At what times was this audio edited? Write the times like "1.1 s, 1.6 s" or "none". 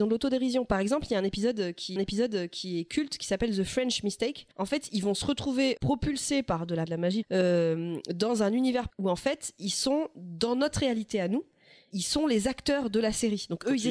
2.0 s, 4.5 s, 5.8 s, 6.9 s, 7.2 s, 8.9 s, 11.9 s